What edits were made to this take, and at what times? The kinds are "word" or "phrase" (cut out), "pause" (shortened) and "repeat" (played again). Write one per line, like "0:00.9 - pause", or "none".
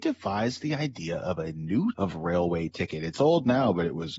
0:01.9 - word